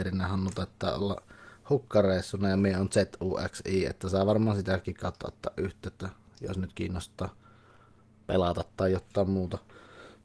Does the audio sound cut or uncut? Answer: uncut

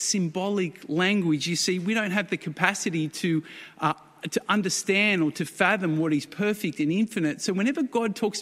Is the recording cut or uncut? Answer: uncut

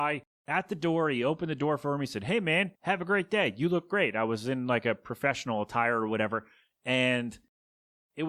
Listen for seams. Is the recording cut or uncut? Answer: cut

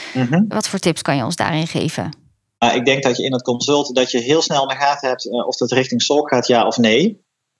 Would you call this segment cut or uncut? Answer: uncut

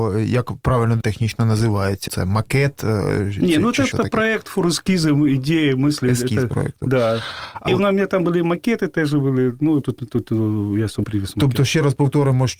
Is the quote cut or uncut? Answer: cut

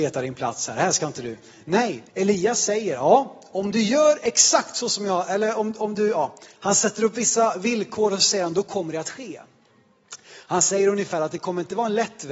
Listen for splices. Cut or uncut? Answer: cut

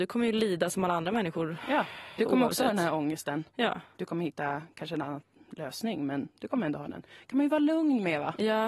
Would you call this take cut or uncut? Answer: uncut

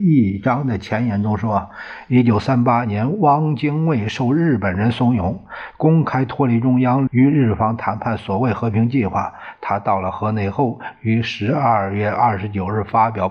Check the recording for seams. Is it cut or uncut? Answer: cut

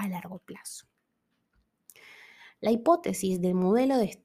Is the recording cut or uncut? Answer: uncut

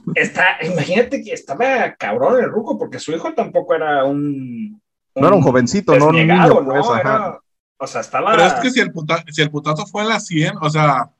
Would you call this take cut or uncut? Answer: uncut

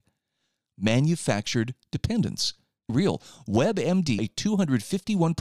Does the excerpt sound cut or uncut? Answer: cut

